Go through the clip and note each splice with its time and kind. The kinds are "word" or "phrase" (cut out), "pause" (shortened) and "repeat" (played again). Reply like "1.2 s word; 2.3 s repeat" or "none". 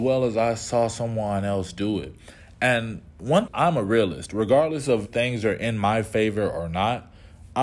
3.5 s phrase; 5.1 s word